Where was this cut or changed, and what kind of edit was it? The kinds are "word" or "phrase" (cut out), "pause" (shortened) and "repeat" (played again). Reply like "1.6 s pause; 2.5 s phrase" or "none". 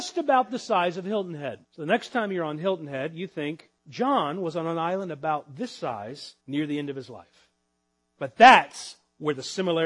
1.6 s pause; 3.8 s pause; 6.4 s pause